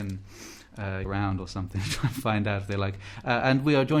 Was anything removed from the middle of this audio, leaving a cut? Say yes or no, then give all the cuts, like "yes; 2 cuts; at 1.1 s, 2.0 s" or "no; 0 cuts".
yes; 1 cut; at 1.0 s